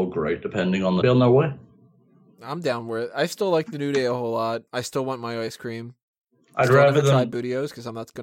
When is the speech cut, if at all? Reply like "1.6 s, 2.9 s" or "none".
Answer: 1.0 s, 4.7 s